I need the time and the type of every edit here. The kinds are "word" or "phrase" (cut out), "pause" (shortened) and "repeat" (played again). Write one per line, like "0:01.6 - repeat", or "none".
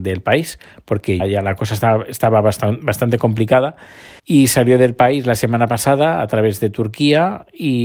0:01.2 - word
0:04.2 - pause